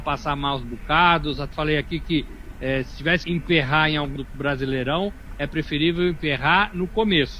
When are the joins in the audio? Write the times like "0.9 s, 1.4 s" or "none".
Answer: 1.5 s, 3.2 s, 4.2 s

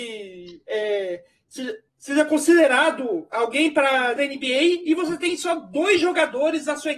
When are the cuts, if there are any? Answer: 1.9 s, 4.2 s

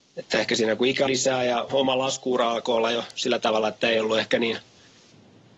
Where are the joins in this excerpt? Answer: 1.1 s, 1.7 s

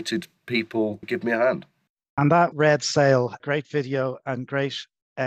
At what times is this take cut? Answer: 1.0 s, 1.9 s, 2.5 s, 3.4 s

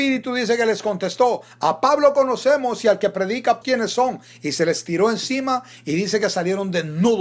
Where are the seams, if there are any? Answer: 3.6 s

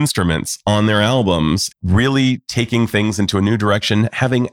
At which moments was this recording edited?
1.7 s

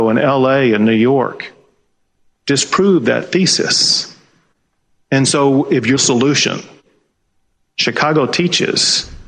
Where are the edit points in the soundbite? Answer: 6.0 s

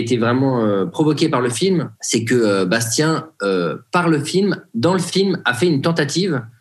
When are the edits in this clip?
1.9 s

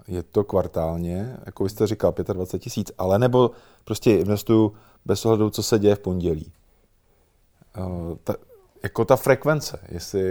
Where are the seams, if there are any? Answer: none

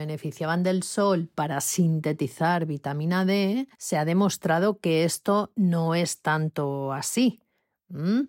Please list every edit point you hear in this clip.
3.7 s

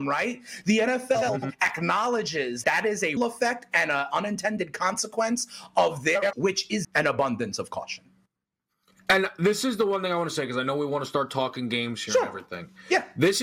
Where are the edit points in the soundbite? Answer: 2.6 s, 3.2 s, 6.3 s, 6.8 s

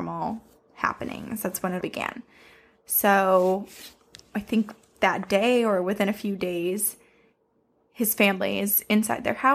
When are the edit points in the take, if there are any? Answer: 1.8 s

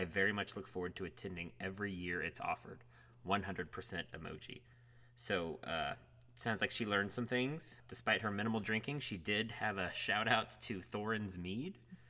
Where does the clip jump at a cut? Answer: none

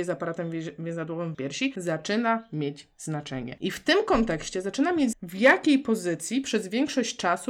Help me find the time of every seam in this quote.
1.3 s, 5.1 s

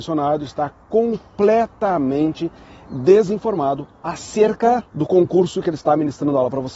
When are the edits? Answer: 4.9 s

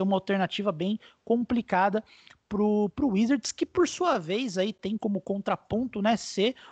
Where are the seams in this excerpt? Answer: none

